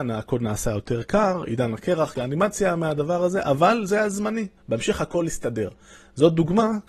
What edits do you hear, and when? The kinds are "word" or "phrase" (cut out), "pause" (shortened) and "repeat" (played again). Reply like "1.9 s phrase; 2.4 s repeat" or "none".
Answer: 2.1 s phrase; 4.6 s pause